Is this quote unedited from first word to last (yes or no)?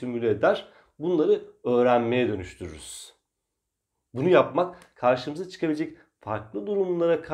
yes